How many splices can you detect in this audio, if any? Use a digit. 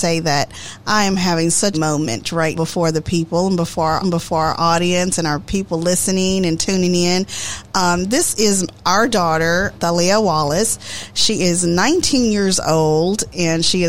4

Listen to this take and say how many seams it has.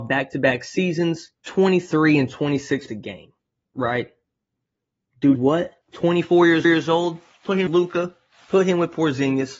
6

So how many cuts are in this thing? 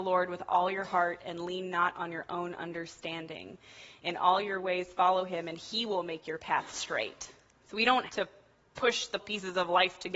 2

